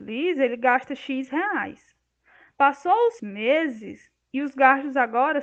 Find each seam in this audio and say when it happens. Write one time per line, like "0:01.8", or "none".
0:03.2